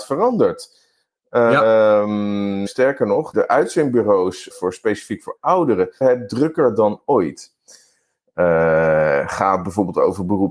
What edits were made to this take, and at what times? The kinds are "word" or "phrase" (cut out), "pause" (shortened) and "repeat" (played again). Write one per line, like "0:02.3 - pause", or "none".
0:02.7 - word
0:03.3 - word
0:04.5 - word
0:06.0 - word